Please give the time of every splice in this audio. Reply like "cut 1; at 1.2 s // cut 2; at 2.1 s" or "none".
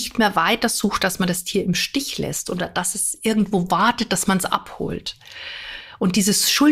none

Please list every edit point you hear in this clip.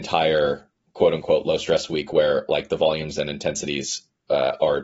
none

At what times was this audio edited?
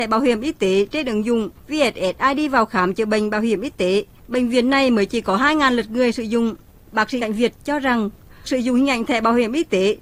cut 1; at 7.2 s // cut 2; at 8.4 s

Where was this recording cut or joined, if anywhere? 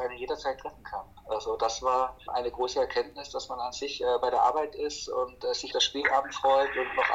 cut 1; at 2.3 s // cut 2; at 5.7 s

